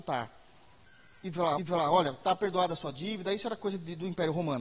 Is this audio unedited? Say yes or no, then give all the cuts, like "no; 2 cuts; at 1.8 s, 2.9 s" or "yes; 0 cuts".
no; 1 cut; at 1.6 s